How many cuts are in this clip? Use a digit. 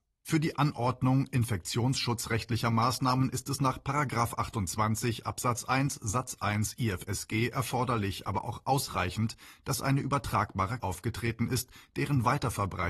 1